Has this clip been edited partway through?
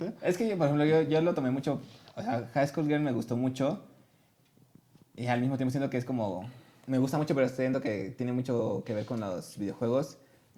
no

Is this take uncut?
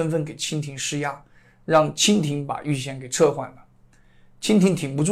yes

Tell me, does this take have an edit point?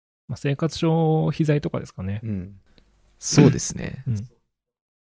no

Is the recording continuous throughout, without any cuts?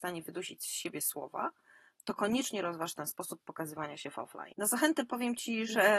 yes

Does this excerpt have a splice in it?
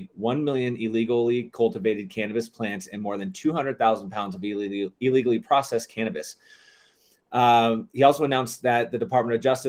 no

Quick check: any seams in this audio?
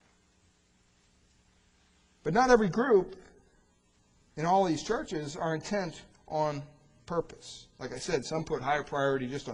no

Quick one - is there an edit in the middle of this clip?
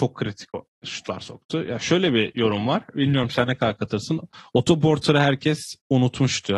no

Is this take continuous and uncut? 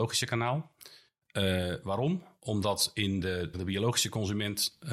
no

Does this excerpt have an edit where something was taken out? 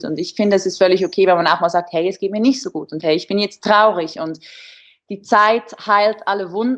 no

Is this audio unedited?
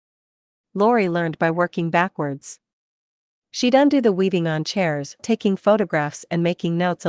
no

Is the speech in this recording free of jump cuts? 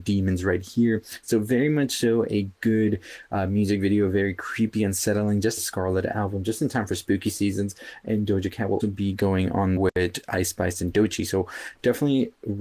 no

